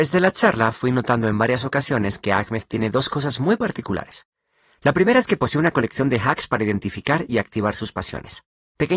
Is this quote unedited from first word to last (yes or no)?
yes